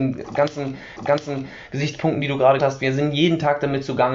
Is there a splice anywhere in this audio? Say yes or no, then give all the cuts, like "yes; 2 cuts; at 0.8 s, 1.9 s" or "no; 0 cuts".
yes; 2 cuts; at 1.0 s, 2.6 s